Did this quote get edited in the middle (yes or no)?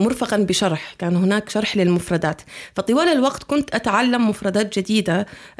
no